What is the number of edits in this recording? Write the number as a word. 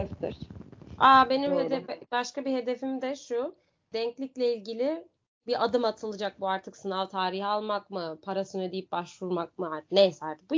zero